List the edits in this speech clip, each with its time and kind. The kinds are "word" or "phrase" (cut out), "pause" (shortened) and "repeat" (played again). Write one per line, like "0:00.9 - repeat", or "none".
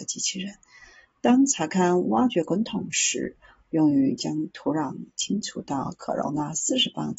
none